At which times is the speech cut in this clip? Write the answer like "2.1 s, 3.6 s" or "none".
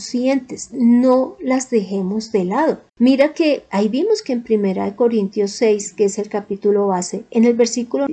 2.9 s